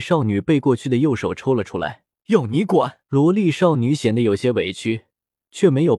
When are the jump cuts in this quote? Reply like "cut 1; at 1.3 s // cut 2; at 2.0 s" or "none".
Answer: cut 1; at 2.1 s // cut 2; at 3.0 s